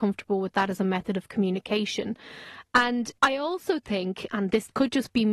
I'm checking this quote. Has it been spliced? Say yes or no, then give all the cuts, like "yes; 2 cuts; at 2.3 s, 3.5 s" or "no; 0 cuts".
yes; 1 cut; at 3.2 s